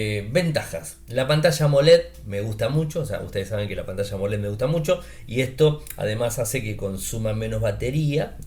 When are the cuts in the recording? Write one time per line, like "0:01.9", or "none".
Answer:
none